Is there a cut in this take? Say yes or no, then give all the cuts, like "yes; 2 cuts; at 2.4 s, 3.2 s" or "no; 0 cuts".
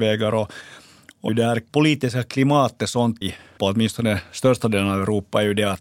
yes; 4 cuts; at 1.3 s, 1.7 s, 3.2 s, 3.6 s